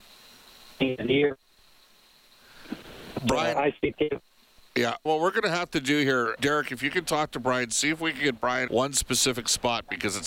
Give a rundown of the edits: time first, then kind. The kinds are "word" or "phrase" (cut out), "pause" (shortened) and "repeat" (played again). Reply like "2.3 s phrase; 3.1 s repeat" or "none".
3.9 s word; 5.1 s word; 6.4 s word; 8.7 s word